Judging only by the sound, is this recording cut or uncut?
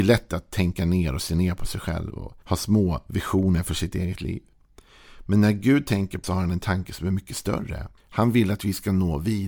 cut